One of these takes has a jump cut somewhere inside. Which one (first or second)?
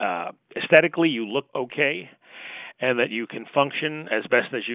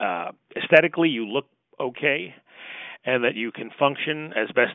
first